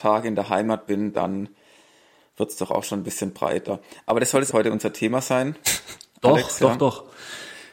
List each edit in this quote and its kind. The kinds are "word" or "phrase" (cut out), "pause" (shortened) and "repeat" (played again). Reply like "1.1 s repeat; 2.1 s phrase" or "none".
4.5 s phrase